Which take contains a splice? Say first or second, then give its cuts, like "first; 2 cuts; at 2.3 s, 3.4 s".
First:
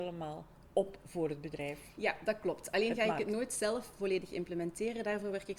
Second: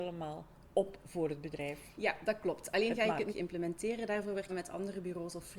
second; 2 cuts; at 3.3 s, 4.5 s